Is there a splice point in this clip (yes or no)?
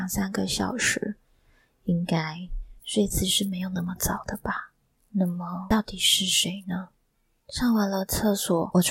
no